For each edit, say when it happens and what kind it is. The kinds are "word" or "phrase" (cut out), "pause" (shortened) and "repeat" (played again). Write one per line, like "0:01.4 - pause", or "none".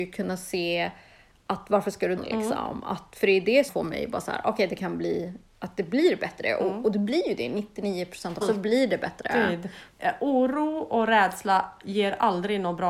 0:02.2 - phrase
0:03.7 - word
0:08.4 - word